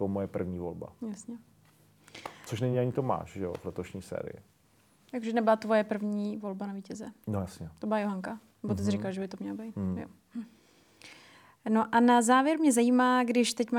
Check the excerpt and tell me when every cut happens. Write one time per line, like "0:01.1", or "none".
none